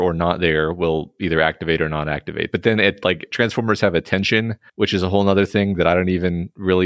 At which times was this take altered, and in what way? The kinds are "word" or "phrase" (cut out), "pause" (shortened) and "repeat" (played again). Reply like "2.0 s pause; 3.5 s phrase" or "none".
4.7 s pause